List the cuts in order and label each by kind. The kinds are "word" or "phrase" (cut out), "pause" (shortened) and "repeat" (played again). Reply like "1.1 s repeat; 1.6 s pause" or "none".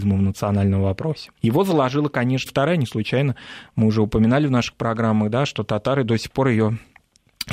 1.4 s pause; 2.5 s word